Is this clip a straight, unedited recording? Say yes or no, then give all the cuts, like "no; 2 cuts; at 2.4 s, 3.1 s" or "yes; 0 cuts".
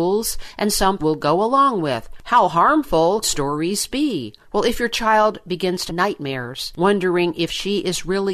no; 3 cuts; at 1.0 s, 3.2 s, 5.9 s